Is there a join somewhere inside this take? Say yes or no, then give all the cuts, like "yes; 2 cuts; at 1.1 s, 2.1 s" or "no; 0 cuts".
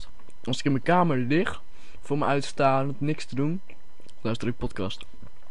no; 0 cuts